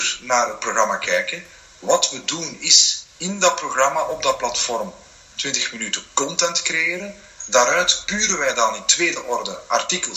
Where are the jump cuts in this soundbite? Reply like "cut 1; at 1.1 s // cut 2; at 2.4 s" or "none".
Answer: none